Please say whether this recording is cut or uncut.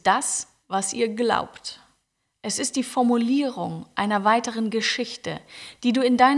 uncut